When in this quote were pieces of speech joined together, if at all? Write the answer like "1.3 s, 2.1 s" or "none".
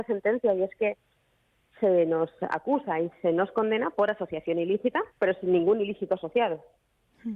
5.1 s